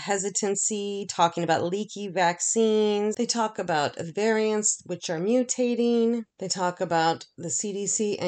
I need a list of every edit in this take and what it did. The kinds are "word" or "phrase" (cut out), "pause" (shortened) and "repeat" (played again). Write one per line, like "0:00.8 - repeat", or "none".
0:06.3 - pause